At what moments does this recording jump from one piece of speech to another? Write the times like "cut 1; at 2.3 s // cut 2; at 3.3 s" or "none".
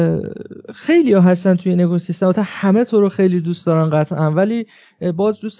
none